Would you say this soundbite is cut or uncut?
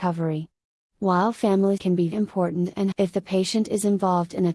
cut